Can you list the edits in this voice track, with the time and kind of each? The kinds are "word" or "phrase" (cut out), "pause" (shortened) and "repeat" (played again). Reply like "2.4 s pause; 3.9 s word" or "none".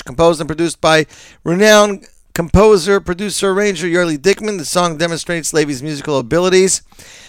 none